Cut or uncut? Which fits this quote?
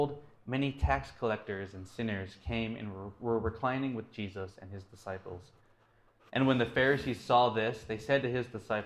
uncut